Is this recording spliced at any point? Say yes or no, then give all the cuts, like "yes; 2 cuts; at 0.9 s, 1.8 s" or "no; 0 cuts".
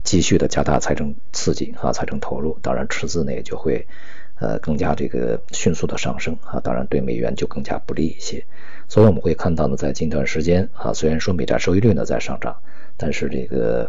no; 0 cuts